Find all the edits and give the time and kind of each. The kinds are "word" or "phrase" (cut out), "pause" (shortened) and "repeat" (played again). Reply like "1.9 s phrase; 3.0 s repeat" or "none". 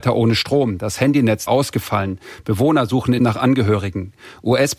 1.5 s word; 3.2 s word